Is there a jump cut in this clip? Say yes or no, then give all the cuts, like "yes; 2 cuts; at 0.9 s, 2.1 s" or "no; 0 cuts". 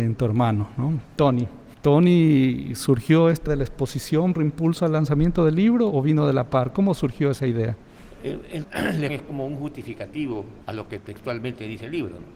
yes; 7 cuts; at 1.7 s, 3.5 s, 4.3 s, 5.9 s, 8.6 s, 9.1 s, 10.6 s